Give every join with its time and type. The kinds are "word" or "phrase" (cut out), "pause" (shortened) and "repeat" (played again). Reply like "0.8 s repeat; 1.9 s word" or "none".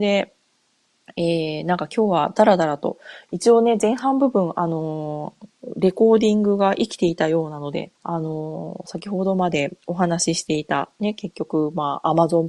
5.5 s pause; 8.0 s pause; 9.8 s pause